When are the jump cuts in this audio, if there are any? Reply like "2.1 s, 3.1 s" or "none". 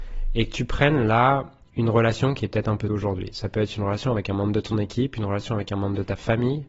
2.9 s